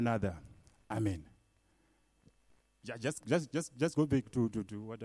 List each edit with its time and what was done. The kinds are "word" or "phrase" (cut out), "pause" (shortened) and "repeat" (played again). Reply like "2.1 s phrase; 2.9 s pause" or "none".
3.2 s word